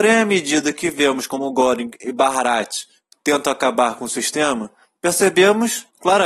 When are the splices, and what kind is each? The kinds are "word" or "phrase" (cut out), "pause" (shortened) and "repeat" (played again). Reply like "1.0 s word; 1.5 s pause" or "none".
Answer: none